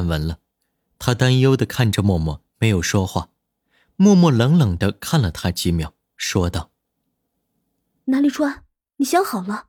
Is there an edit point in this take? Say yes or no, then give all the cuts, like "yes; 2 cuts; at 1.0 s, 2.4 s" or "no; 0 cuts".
no; 0 cuts